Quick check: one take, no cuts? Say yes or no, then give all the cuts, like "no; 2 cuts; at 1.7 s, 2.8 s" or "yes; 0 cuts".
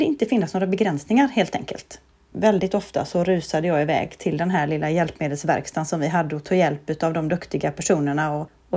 yes; 0 cuts